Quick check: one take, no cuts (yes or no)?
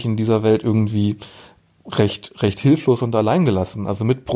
yes